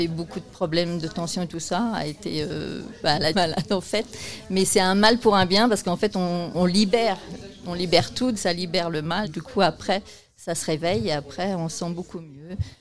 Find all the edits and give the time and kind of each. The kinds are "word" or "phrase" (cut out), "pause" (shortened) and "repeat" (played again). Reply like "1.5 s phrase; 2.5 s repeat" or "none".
3.3 s word; 6.5 s word; 8.3 s word; 9.2 s word